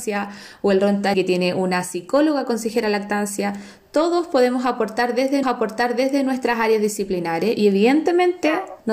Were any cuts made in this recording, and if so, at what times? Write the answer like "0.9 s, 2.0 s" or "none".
1.1 s, 5.4 s